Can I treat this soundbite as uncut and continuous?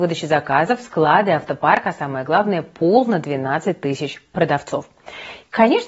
yes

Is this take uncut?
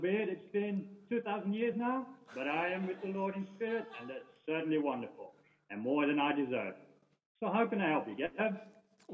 yes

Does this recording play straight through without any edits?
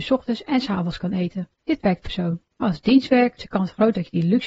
no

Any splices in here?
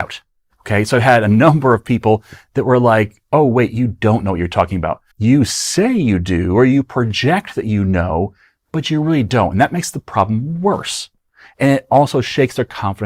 yes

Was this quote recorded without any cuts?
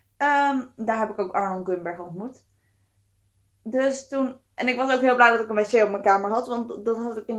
yes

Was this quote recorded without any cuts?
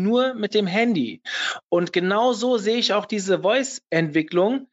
yes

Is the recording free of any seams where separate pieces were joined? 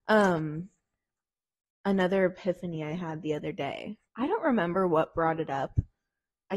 no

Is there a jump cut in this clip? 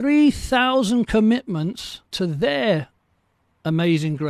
yes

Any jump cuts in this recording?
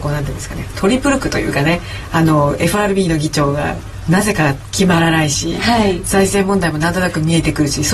no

